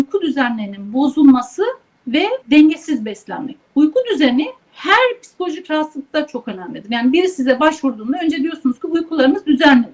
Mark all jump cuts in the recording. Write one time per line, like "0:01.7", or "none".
0:02.4
0:04.6